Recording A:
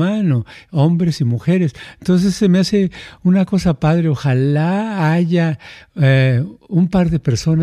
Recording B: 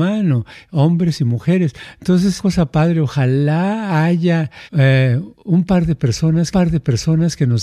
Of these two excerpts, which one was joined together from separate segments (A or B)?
B